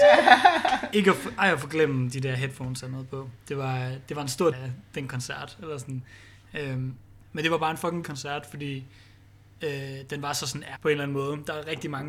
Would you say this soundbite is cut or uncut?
cut